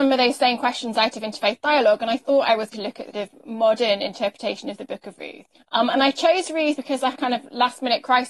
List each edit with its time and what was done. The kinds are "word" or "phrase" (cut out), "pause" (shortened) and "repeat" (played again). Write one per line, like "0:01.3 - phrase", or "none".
0:02.7 - word
0:03.1 - word
0:05.5 - pause
0:06.8 - word
0:07.1 - word